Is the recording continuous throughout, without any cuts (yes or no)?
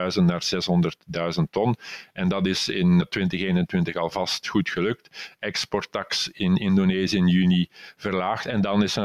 no